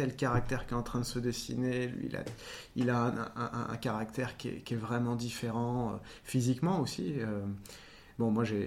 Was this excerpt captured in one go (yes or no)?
yes